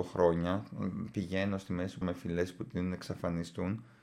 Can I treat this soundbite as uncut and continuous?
no; 1 cut; at 2.0 s

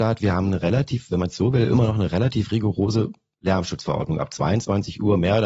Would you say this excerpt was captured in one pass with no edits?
yes; 0 cuts

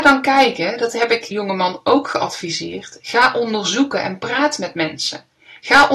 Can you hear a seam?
yes; 1 cut; at 1.3 s

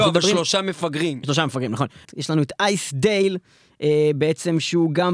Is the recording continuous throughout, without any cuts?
yes; 0 cuts

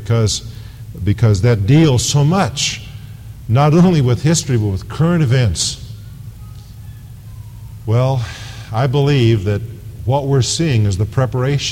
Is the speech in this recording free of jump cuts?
yes; 0 cuts

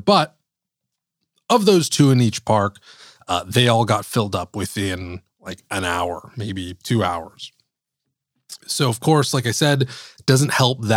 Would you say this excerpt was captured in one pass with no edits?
yes; 0 cuts

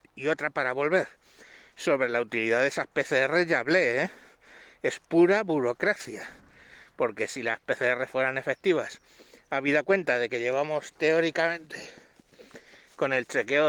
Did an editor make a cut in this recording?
no; 0 cuts

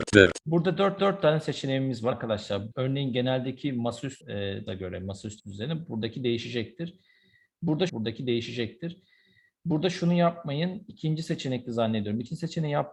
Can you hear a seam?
yes; 7 cuts; at 1.0 s, 2.1 s, 2.7 s, 4.2 s, 4.7 s, 5.4 s, 7.9 s

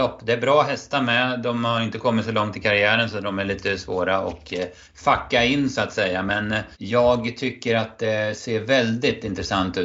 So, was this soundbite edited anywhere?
yes; 2 cuts; at 4.8 s, 6.7 s

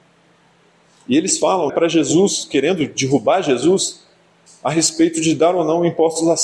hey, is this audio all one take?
no; 1 cut; at 1.7 s

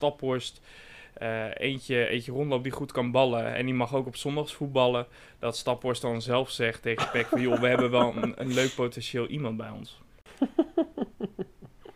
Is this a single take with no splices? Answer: yes; 0 cuts

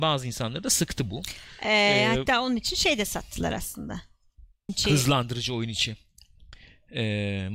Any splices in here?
yes; 1 cut; at 4.7 s

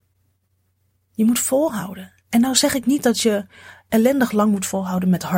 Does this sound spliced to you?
no; 0 cuts

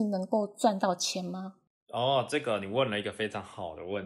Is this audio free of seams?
yes; 0 cuts

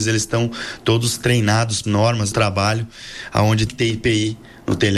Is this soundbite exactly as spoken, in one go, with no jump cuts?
no; 3 cuts; at 1.8 s, 2.3 s, 3.7 s

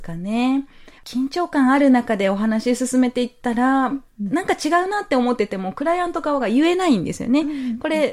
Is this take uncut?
no; 1 cut; at 1.0 s

